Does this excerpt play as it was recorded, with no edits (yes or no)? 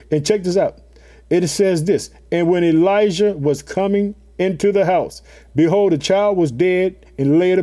yes